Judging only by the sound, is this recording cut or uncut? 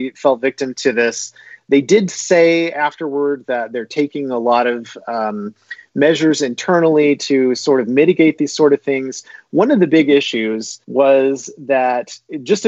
cut